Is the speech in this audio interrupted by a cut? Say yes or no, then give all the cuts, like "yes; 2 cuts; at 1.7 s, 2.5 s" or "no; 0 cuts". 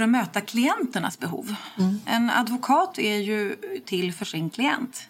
no; 0 cuts